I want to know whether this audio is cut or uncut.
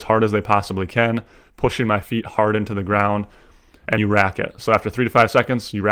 cut